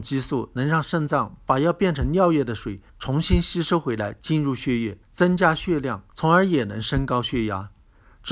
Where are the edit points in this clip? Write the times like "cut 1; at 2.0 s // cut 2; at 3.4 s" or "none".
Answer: cut 1; at 2.9 s // cut 2; at 5.0 s // cut 3; at 6.1 s